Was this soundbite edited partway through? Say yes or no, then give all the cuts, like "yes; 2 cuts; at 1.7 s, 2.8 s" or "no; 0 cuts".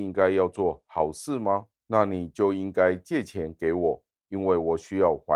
yes; 1 cut; at 1.8 s